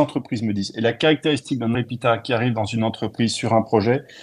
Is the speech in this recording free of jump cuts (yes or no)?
no